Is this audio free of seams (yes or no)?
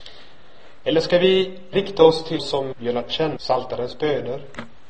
no